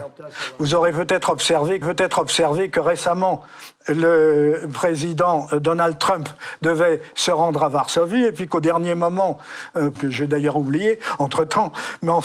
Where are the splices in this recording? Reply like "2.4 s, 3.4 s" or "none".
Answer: 1.8 s, 10.0 s